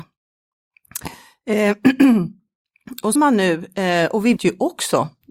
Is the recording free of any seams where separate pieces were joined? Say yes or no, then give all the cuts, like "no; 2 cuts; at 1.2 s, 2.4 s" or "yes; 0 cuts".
no; 2 cuts; at 3.2 s, 4.4 s